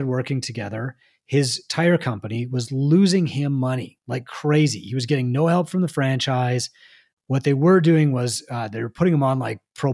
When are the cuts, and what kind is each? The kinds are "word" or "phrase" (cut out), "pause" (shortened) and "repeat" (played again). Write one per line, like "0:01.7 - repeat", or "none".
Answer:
none